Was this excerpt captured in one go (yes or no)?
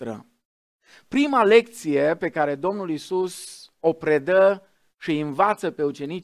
yes